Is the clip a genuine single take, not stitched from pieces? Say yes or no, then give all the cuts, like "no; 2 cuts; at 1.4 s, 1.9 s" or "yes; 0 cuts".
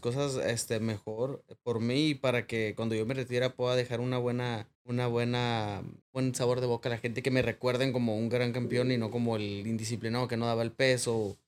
no; 2 cuts; at 4.7 s, 6.0 s